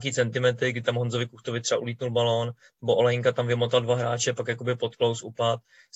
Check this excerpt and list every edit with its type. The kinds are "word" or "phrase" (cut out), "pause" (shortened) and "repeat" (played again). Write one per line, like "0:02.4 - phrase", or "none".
none

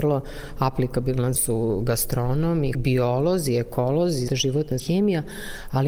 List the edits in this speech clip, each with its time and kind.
0:01.3 - phrase
0:02.7 - word
0:04.3 - word
0:04.8 - word

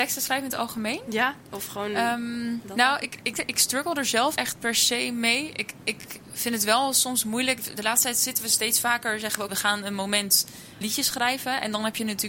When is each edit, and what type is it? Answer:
0:02.6 - word
0:03.3 - word
0:04.4 - word
0:09.5 - word
0:10.8 - word

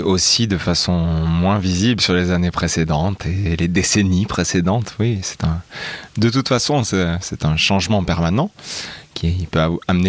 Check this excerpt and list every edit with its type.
none

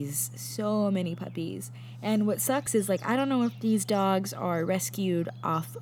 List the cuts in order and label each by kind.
none

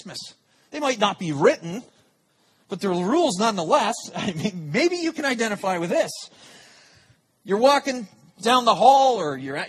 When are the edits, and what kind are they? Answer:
none

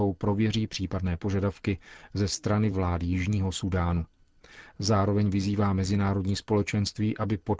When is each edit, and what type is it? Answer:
none

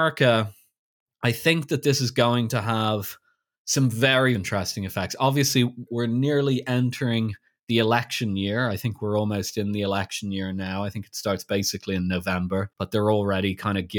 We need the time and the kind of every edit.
0:04.3 - word
0:05.9 - word
0:12.7 - pause

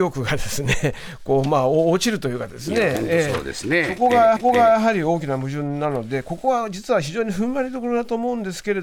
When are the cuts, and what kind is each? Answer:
0:04.4 - repeat

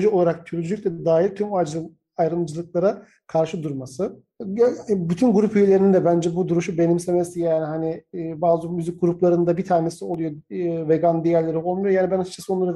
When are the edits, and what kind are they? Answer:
none

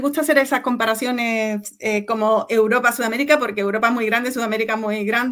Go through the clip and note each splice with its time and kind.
none

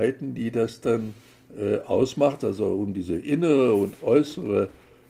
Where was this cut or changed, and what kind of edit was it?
none

